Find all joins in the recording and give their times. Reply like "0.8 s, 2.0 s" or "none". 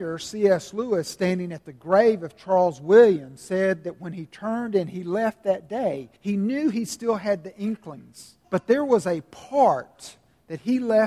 6.2 s, 8.4 s